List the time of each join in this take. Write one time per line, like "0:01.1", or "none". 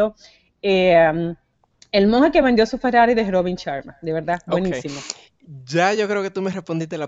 none